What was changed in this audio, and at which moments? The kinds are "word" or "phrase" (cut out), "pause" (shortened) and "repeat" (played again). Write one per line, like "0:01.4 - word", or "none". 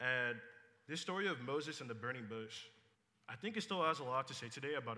0:02.9 - pause